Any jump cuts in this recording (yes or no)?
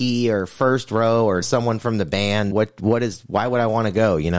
yes